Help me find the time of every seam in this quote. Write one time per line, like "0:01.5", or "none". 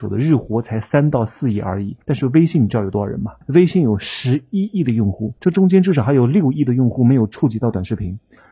0:02.0
0:03.4
0:05.4